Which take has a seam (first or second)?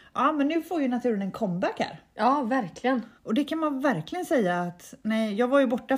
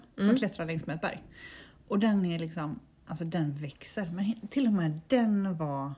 first